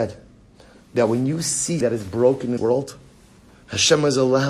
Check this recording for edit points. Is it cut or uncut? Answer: cut